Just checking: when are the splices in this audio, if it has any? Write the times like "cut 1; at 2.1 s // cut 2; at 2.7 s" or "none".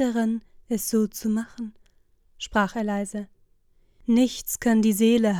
none